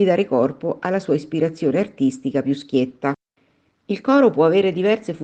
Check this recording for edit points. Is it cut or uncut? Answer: uncut